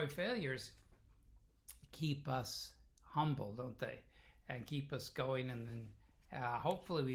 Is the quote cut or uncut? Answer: uncut